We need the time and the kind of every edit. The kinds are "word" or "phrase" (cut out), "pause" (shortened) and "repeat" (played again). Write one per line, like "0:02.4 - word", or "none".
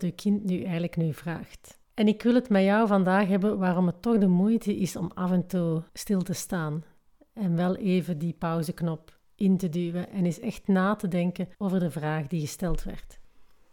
0:01.8 - pause
0:05.9 - pause
0:11.5 - pause